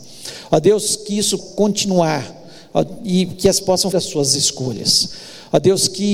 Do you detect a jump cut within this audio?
yes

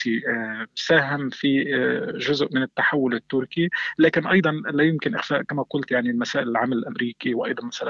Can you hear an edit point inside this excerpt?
no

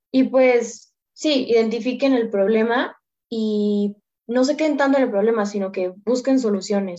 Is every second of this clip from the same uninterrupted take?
yes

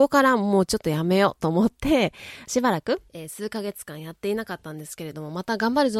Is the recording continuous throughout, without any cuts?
no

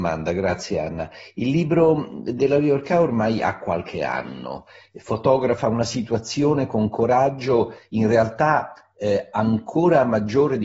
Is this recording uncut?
yes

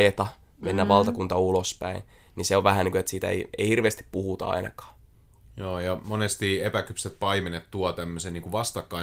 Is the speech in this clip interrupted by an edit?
no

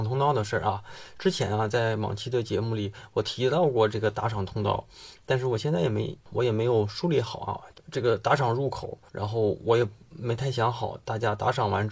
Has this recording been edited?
yes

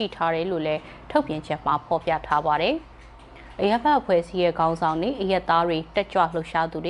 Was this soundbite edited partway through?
yes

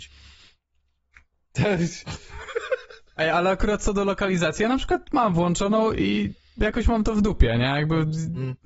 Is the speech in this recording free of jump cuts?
yes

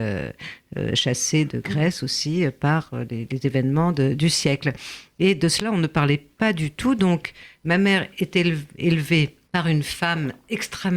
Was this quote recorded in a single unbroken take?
no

